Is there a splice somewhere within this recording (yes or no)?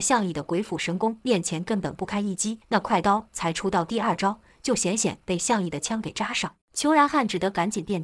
yes